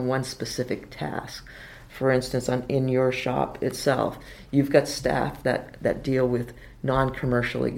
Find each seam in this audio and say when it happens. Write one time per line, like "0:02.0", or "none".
none